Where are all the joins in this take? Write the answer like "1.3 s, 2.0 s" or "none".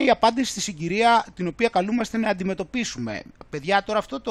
none